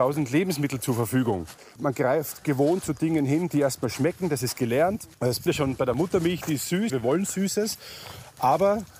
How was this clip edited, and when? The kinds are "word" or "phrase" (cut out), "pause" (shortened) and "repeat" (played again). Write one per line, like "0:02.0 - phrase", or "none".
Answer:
0:05.1 - pause
0:05.5 - word
0:06.9 - word